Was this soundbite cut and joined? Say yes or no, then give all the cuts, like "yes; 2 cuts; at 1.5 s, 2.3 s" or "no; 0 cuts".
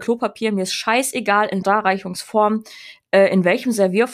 yes; 1 cut; at 1.6 s